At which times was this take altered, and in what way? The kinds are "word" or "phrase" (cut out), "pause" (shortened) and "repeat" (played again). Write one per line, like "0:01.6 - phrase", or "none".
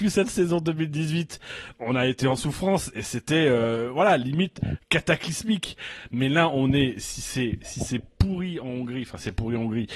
none